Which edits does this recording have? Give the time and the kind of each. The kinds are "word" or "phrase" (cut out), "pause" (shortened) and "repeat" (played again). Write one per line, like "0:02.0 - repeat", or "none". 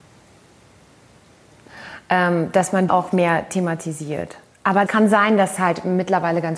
0:02.9 - word
0:04.9 - word
0:05.6 - word